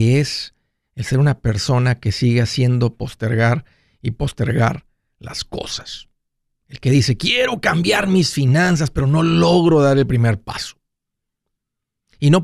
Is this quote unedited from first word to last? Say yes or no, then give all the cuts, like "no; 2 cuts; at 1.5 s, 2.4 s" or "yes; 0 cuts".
yes; 0 cuts